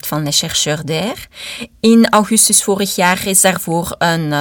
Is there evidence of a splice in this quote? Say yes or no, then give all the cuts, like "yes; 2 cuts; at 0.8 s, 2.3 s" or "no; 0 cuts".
no; 0 cuts